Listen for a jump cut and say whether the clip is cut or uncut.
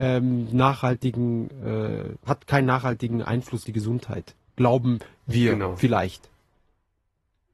cut